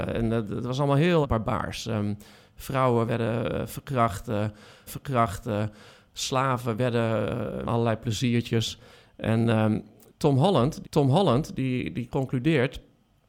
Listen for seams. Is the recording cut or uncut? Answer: cut